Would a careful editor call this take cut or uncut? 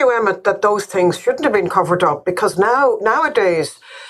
uncut